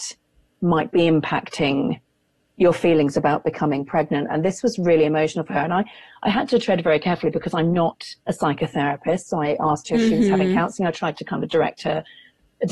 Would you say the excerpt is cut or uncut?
uncut